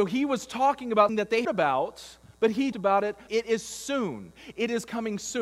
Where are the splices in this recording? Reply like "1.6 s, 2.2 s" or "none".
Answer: 1.1 s, 1.4 s, 2.3 s, 2.7 s, 3.3 s